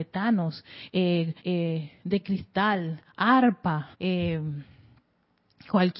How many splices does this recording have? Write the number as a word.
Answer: two